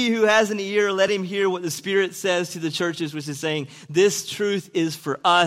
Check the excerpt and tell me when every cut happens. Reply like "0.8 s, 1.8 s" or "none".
none